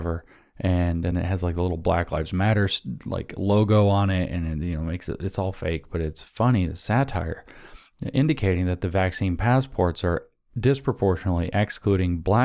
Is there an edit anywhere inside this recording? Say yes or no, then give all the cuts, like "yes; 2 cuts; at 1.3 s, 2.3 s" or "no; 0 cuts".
no; 0 cuts